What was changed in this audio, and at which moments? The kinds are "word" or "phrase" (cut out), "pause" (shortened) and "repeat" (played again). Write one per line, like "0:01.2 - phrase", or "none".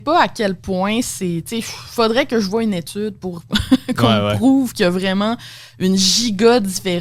none

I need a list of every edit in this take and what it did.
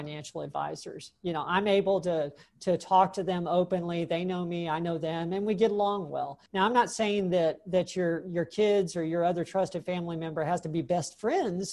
0:06.5 - pause

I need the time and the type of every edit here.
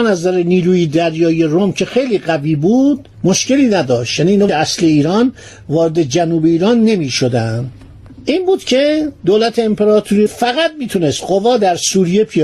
0:04.5 - phrase
0:09.2 - pause
0:10.3 - word

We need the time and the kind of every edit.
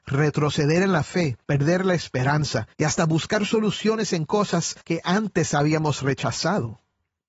0:01.4 - pause
0:02.7 - pause
0:04.8 - pause

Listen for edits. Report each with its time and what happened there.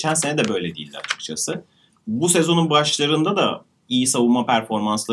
none

